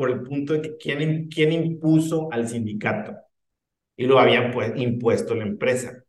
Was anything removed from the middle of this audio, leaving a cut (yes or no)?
no